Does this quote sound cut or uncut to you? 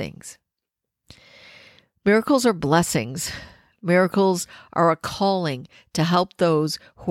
uncut